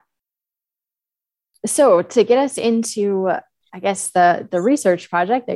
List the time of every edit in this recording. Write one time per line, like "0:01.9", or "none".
none